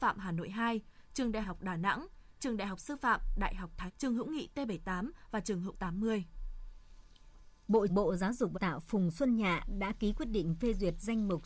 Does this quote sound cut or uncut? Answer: cut